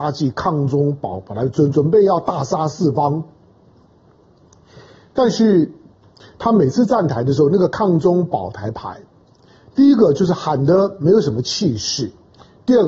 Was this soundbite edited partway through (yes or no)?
no